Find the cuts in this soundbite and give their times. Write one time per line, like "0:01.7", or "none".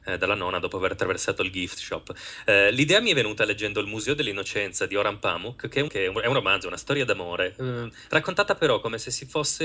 0:05.9